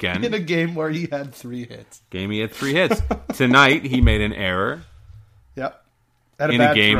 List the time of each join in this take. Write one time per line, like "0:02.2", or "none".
none